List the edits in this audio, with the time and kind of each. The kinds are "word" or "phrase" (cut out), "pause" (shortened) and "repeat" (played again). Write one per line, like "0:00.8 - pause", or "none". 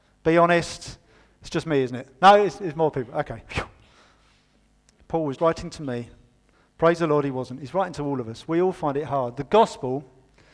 0:05.4 - word
0:06.5 - pause

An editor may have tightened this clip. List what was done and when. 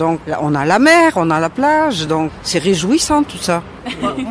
none

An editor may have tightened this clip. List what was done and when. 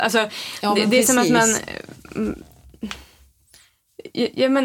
none

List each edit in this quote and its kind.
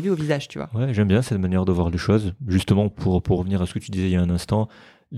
none

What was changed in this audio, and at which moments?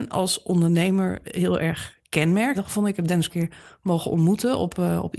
0:01.2 - word
0:02.5 - phrase
0:03.3 - phrase

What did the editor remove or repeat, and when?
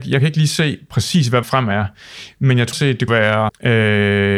0:01.4 - word
0:02.7 - word
0:03.1 - word
0:03.5 - word

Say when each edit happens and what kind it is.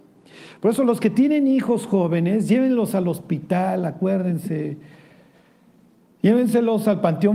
none

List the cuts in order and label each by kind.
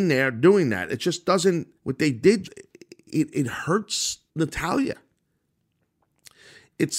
0:01.8 - pause
0:02.4 - word
0:04.3 - pause

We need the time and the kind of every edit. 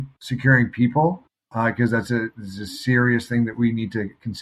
none

